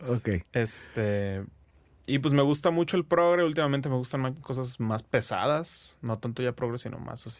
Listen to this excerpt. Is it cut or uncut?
cut